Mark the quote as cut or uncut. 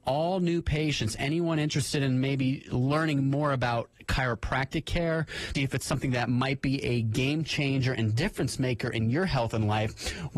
cut